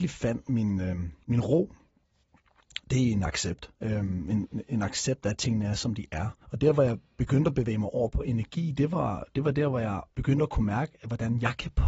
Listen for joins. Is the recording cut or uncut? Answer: cut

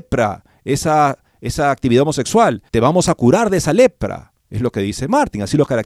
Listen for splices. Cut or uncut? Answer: cut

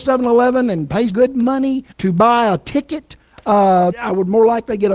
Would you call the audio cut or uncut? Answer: cut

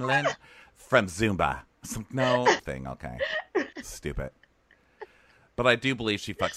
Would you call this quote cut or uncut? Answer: cut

